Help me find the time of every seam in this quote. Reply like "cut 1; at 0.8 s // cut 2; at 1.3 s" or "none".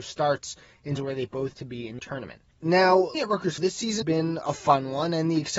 cut 1; at 1.0 s // cut 2; at 1.5 s // cut 3; at 2.0 s // cut 4; at 3.1 s // cut 5; at 3.6 s // cut 6; at 4.0 s

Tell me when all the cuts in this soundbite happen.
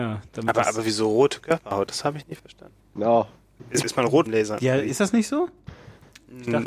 cut 1; at 3.8 s // cut 2; at 4.3 s

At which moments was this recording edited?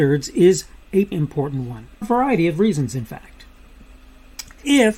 cut 1; at 1.1 s // cut 2; at 2.0 s

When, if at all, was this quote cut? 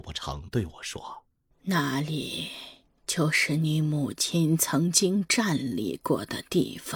cut 1; at 1.3 s

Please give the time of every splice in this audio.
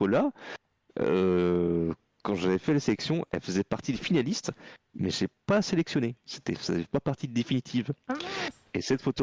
none

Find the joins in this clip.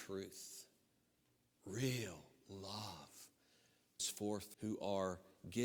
cut 1; at 4.0 s // cut 2; at 4.5 s

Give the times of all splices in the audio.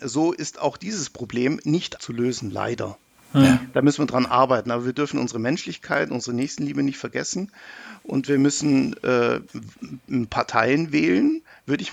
cut 1; at 2.0 s

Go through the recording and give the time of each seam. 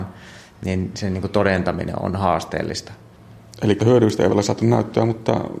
cut 1; at 0.9 s // cut 2; at 2.0 s // cut 3; at 3.8 s // cut 4; at 4.3 s

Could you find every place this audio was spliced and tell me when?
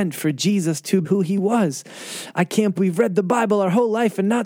cut 1; at 1.0 s // cut 2; at 2.8 s

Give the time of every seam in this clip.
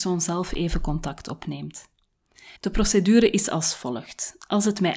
cut 1; at 2.6 s

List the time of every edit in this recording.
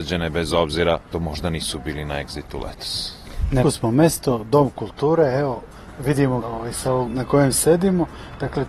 cut 1; at 1.1 s // cut 2; at 3.6 s // cut 3; at 6.4 s // cut 4; at 7.1 s

